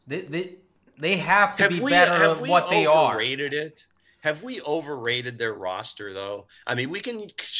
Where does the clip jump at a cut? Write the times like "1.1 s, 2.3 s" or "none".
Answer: none